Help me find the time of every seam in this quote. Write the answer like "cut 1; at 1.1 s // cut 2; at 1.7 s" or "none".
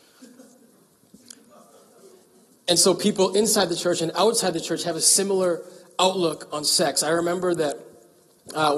none